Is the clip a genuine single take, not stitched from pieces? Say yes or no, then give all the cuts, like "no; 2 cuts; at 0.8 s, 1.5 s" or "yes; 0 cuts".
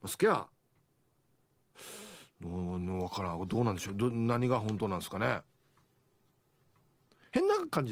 yes; 0 cuts